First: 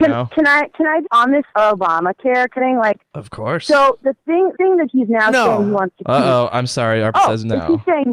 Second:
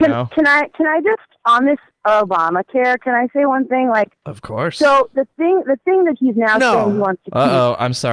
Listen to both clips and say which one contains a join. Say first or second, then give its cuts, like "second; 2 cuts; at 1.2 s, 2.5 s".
first; 5 cuts; at 1.0 s, 1.5 s, 2.6 s, 4.5 s, 7.1 s